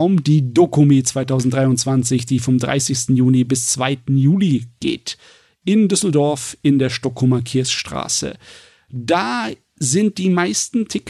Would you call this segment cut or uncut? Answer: uncut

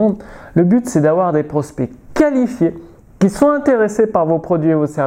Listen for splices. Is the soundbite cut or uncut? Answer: uncut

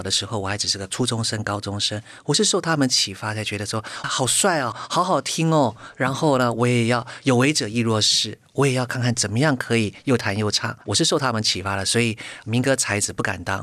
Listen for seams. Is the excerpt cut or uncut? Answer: cut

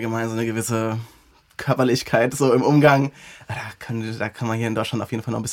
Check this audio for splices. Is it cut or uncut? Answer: uncut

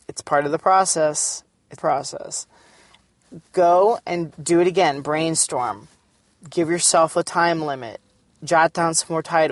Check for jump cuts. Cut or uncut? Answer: cut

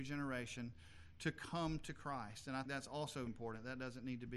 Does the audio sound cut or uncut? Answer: cut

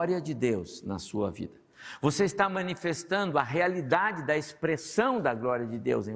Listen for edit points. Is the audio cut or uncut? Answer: uncut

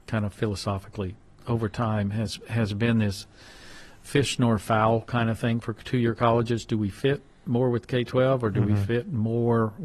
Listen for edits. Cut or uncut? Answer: uncut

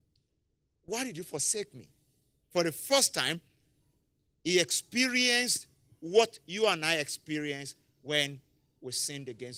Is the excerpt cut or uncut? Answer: uncut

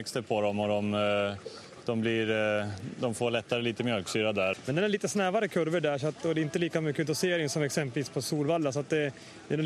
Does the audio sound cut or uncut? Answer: uncut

